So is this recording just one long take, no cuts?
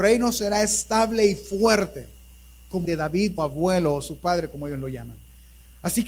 no; 2 cuts; at 2.8 s, 3.4 s

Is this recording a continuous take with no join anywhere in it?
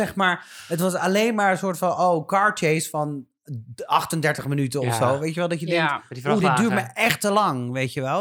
yes; 0 cuts

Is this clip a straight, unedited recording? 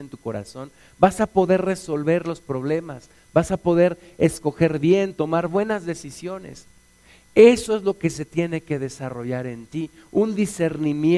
yes; 0 cuts

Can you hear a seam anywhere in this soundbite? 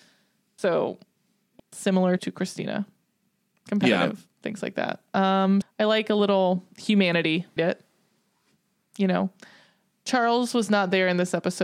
yes; 4 cuts; at 1.6 s, 2.2 s, 5.6 s, 7.6 s

